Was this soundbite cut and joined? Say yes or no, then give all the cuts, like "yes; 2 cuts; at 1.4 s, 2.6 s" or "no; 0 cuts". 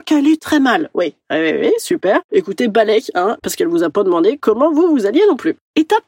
no; 0 cuts